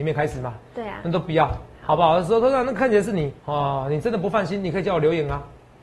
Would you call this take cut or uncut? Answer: cut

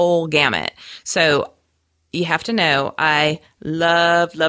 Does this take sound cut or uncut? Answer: uncut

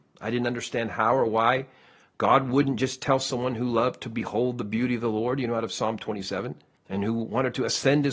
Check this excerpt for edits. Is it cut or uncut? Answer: cut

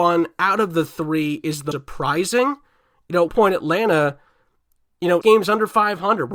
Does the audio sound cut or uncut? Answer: cut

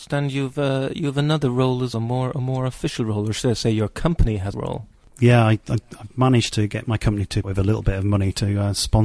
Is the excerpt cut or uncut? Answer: cut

